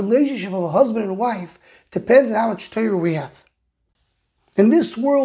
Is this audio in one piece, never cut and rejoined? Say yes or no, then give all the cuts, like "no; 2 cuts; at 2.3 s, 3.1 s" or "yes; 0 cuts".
yes; 0 cuts